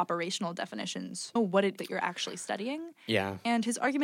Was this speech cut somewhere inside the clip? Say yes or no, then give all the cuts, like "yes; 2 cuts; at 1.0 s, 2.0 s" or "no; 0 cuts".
yes; 2 cuts; at 1.4 s, 1.8 s